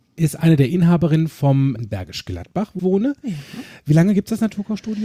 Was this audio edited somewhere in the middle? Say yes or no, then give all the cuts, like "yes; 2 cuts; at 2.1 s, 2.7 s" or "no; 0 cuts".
yes; 2 cuts; at 1.8 s, 2.8 s